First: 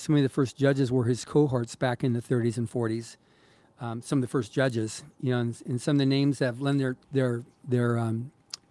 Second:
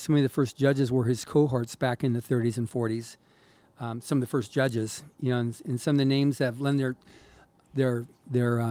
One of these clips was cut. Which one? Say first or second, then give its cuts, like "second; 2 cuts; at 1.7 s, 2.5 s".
first; 1 cut; at 7.0 s